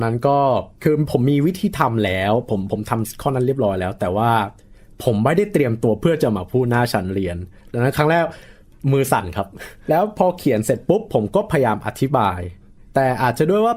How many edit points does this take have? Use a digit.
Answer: 1